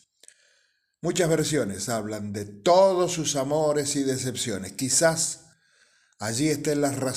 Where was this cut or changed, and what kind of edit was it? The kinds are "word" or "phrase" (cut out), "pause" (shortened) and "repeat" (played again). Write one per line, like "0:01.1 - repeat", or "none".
none